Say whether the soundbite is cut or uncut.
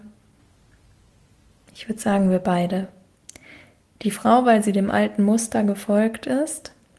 uncut